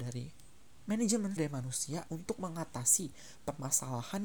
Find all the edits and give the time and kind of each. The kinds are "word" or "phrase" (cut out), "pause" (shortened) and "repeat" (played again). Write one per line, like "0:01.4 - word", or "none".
0:01.4 - word
0:02.1 - word

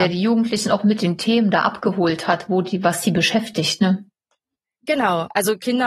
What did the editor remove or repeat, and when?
none

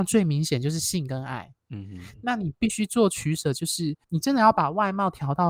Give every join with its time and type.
0:04.0 - pause

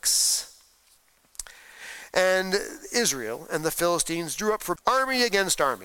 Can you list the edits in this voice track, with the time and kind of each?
0:04.8 - word

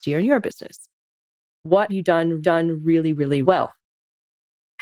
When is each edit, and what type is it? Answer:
0:01.9 - word
0:02.4 - repeat
0:03.4 - word

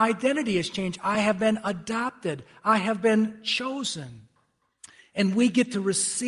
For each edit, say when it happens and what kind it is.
none

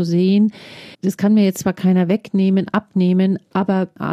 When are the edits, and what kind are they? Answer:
0:00.9 - pause

